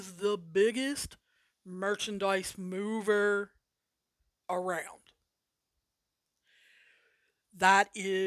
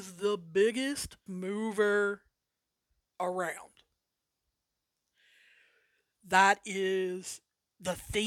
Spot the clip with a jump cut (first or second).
second